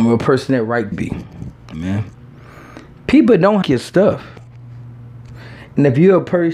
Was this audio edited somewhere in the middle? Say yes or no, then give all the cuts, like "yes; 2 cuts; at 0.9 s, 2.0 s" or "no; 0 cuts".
yes; 3 cuts; at 0.9 s, 1.7 s, 3.6 s